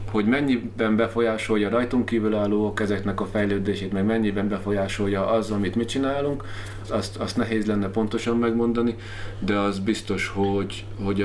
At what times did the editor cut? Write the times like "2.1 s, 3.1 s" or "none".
6.8 s